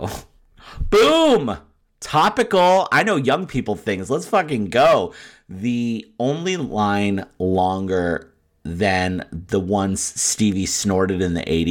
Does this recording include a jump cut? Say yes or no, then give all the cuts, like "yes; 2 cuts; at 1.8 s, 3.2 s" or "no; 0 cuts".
no; 0 cuts